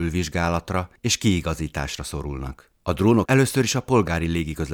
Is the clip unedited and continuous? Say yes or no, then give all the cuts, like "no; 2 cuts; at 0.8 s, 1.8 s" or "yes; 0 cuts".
no; 3 cuts; at 1.0 s, 2.8 s, 3.2 s